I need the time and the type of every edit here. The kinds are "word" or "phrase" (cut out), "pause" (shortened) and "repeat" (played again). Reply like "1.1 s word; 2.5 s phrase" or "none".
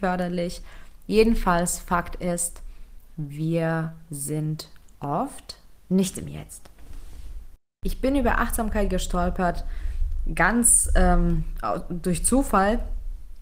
none